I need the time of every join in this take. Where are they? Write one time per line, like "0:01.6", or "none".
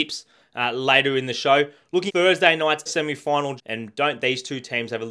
0:02.1
0:02.9
0:03.6